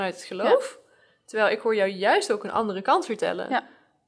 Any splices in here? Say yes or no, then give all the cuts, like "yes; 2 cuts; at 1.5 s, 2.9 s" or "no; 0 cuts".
no; 0 cuts